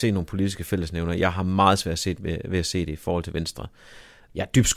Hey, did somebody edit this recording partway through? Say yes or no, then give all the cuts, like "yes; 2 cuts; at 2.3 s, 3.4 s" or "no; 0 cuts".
no; 0 cuts